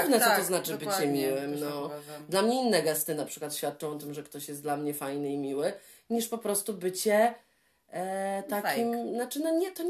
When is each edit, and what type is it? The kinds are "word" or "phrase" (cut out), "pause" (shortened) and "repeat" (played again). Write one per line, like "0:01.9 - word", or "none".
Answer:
none